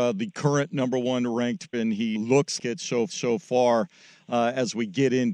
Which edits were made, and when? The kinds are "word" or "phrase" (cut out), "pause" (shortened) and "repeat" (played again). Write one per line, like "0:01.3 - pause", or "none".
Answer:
0:01.7 - word
0:02.2 - word
0:02.6 - word
0:03.1 - repeat

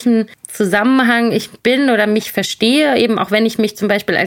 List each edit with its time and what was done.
0:01.6 - pause

